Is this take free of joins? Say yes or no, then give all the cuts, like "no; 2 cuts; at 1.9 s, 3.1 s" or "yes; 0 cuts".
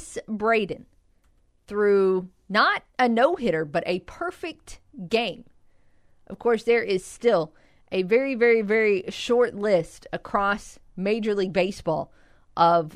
no; 1 cut; at 2.9 s